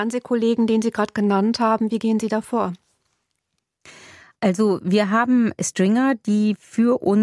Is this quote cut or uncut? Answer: uncut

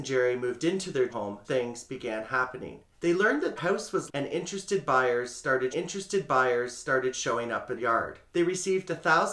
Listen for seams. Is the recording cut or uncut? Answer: cut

